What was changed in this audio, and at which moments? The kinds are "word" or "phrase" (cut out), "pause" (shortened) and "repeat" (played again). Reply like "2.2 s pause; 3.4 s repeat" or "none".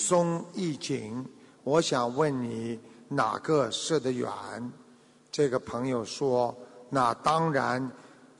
none